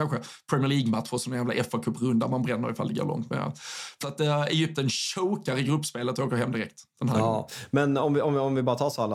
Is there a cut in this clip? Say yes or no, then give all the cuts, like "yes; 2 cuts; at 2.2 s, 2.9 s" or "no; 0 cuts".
yes; 1 cut; at 4.0 s